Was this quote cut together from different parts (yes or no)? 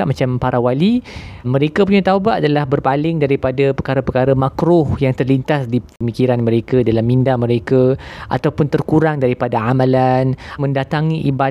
yes